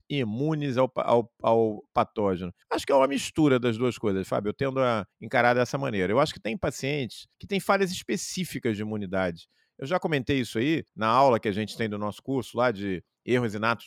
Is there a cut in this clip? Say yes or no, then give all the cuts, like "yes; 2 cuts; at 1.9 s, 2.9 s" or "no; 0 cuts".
yes; 4 cuts; at 2.6 s, 5.1 s, 7.3 s, 10.9 s